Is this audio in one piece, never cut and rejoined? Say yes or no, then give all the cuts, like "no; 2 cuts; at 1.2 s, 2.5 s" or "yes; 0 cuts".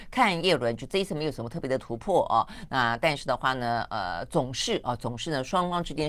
yes; 0 cuts